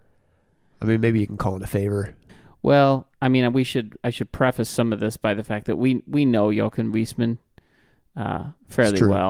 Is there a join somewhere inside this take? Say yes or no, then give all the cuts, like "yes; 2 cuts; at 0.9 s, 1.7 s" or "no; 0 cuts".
no; 0 cuts